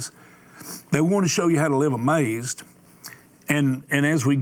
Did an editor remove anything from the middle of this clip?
no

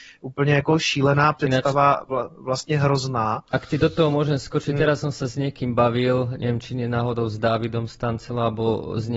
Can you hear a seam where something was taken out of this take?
no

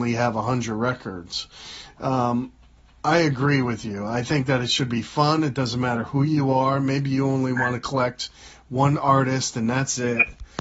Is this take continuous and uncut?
yes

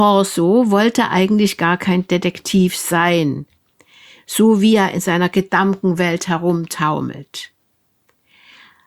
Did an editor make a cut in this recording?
no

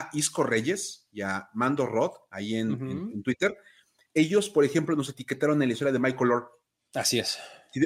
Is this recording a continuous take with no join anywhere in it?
yes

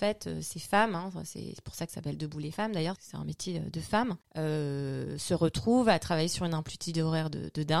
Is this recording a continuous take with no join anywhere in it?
no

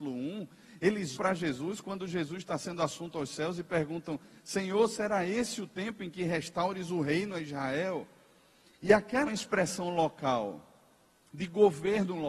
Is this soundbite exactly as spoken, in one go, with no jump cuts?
no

